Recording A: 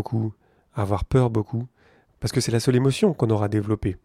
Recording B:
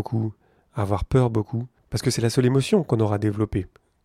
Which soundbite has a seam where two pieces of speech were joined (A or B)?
B